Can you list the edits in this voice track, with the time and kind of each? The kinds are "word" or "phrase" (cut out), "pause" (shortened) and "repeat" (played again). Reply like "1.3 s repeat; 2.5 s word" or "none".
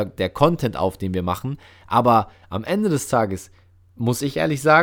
none